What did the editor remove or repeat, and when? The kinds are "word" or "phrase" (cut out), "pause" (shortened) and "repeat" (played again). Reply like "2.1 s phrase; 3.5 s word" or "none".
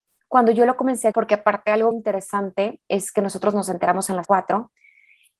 1.1 s word; 1.9 s word; 4.2 s word